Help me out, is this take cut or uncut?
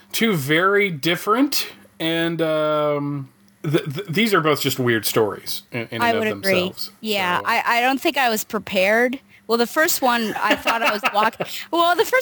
uncut